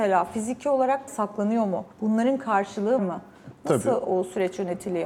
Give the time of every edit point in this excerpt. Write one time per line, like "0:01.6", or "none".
0:01.1
0:01.9
0:03.0